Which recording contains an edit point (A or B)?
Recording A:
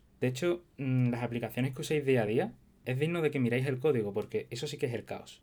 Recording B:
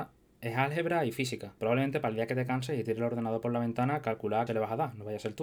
B